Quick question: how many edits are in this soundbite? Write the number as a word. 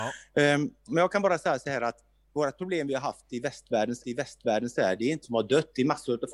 two